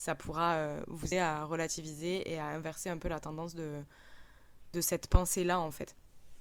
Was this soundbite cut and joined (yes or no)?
yes